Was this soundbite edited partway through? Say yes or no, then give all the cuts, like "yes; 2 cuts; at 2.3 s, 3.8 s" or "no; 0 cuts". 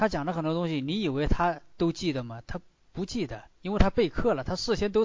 no; 0 cuts